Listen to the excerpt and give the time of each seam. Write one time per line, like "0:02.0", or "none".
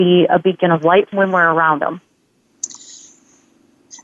0:01.1